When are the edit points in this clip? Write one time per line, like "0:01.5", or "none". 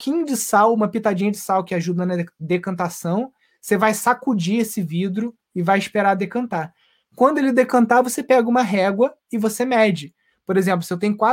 none